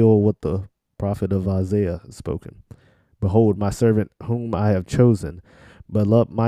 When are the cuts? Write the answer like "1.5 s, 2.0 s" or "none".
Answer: none